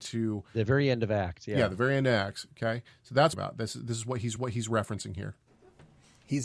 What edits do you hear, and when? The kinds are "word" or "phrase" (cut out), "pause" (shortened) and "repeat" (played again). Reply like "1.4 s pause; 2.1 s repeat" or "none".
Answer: 3.3 s phrase; 4.4 s repeat